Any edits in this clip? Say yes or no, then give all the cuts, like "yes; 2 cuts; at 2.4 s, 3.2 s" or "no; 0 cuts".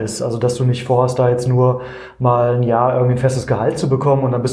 no; 0 cuts